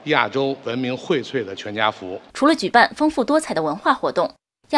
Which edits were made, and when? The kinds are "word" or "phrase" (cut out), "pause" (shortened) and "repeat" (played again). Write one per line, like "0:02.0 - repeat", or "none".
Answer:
0:02.3 - pause